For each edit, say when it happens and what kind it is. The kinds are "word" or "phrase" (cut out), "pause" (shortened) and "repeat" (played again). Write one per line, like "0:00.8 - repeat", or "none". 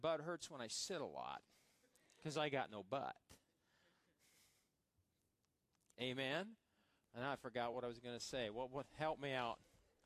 none